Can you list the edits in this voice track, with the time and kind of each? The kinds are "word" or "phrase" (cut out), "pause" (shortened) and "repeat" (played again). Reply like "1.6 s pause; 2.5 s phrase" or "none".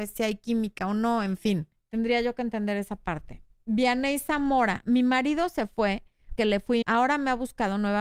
1.8 s pause; 6.4 s word; 6.8 s word

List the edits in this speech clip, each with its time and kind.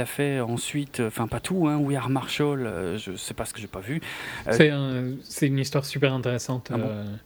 3.0 s word; 3.6 s word

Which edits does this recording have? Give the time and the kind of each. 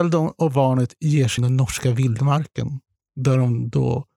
1.4 s phrase

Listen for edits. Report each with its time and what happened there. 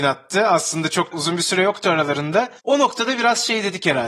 1.1 s word; 2.6 s pause

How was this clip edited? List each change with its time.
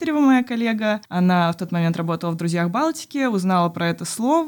1.0 s pause

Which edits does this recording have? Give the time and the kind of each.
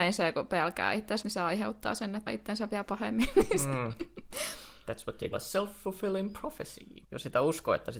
1.2 s word; 2.3 s word; 5.3 s word; 7.0 s pause

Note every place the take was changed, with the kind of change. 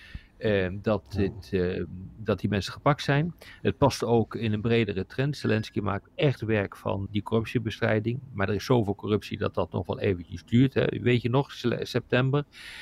7.1 s word

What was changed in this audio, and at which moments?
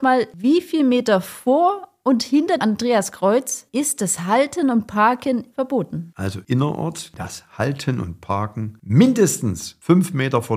2.6 s word; 5.5 s word; 7.1 s word

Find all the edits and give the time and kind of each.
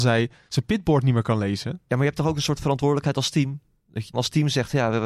4.1 s phrase

